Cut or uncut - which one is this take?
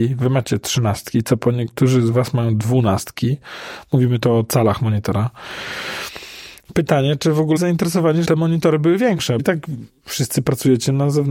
cut